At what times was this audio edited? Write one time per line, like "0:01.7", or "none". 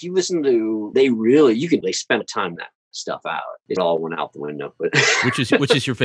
0:00.9
0:01.8
0:02.2
0:02.6
0:03.8